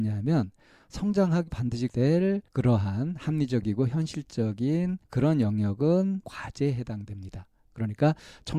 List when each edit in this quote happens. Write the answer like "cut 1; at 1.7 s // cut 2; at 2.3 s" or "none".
cut 1; at 1.5 s // cut 2; at 1.9 s // cut 3; at 2.5 s // cut 4; at 5.0 s // cut 5; at 6.2 s